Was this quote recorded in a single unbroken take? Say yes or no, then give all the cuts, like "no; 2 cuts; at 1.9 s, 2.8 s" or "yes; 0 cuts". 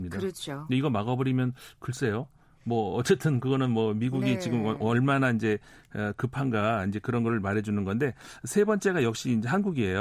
yes; 0 cuts